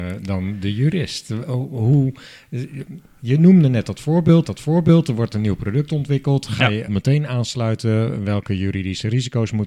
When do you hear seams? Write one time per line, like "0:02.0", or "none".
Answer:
0:04.4
0:06.9